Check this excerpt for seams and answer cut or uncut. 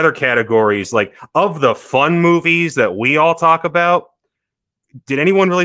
uncut